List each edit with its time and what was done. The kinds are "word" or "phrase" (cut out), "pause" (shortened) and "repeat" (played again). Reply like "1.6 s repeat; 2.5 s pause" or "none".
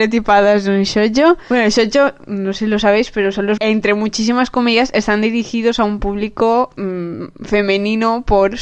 3.6 s phrase